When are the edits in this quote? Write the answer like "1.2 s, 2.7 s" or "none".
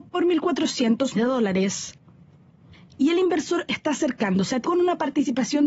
1.1 s, 3.7 s, 4.6 s

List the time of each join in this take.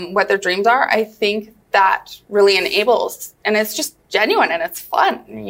none

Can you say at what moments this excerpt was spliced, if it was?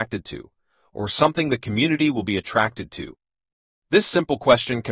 none

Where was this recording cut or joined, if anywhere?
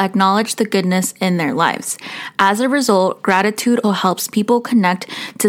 3.8 s

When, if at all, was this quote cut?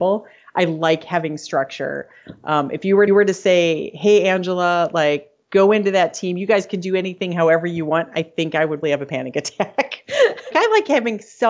3.1 s, 8.8 s, 10.5 s

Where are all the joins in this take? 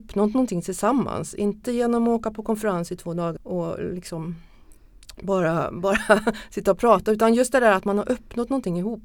3.4 s

